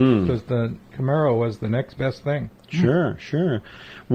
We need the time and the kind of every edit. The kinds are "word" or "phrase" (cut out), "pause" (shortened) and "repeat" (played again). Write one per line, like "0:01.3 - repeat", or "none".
none